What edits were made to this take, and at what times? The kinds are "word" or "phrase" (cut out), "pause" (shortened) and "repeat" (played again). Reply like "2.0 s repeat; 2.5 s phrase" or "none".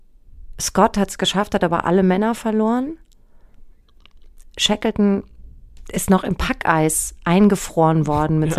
none

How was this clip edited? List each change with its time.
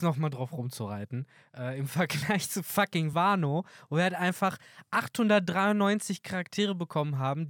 none

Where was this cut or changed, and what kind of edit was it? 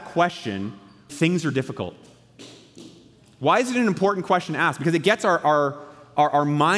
1.1 s word

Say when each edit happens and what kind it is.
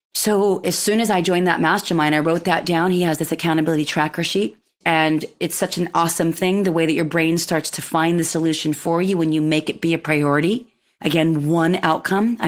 none

